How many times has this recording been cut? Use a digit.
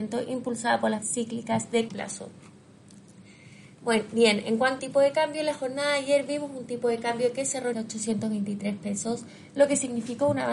4